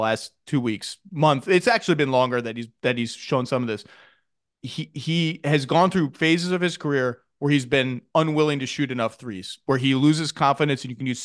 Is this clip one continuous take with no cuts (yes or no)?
yes